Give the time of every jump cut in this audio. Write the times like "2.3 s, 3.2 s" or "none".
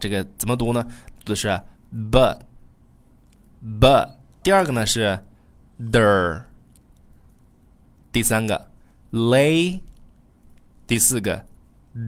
4.4 s